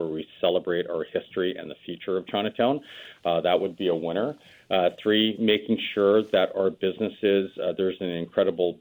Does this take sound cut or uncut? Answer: uncut